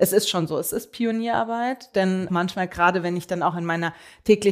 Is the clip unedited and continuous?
no; 1 cut; at 2.3 s

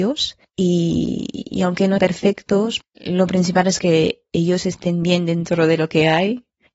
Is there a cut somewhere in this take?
yes; 2 cuts; at 2.0 s, 2.8 s

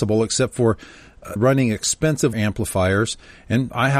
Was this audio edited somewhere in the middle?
yes; 2 cuts; at 1.4 s, 2.3 s

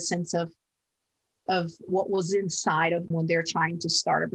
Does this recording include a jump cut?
yes; 3 cuts; at 1.5 s, 1.9 s, 3.1 s

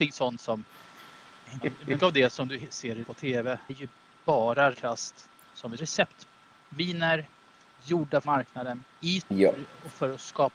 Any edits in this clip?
yes; 8 cuts; at 1.6 s, 2.0 s, 3.0 s, 3.7 s, 4.7 s, 5.8 s, 8.2 s, 9.2 s

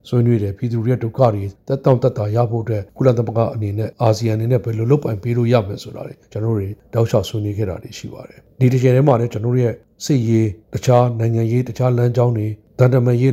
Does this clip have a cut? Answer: no; 0 cuts

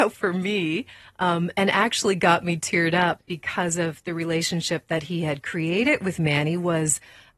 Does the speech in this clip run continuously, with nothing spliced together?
yes; 0 cuts

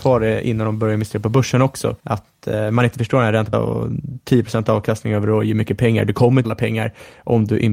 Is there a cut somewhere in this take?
yes; 3 cuts; at 2.0 s, 3.5 s, 6.4 s

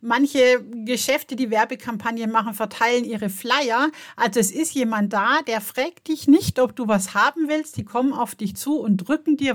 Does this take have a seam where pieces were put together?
no; 0 cuts

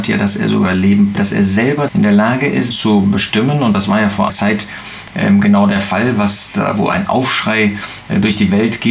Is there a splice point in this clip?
yes; 4 cuts; at 1.1 s, 1.9 s, 2.7 s, 4.3 s

